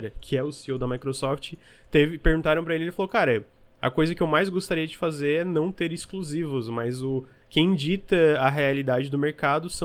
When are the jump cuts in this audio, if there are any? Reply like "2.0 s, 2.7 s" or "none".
none